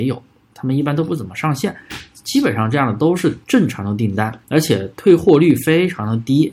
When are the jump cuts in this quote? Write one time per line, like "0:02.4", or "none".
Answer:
0:03.4
0:04.4